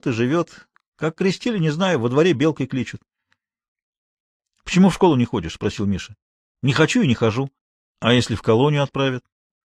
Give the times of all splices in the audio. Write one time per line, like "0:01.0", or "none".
0:07.6